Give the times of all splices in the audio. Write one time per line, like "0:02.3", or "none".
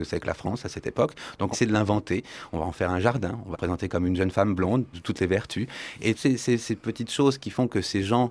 0:01.5
0:03.5
0:04.9
0:06.1